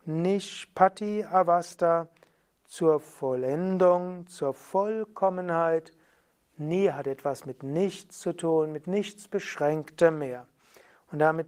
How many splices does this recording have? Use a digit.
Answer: 0